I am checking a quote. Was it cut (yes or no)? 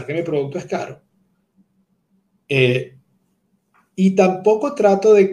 no